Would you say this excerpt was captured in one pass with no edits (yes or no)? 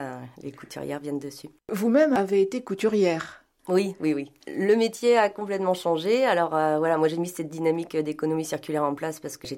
no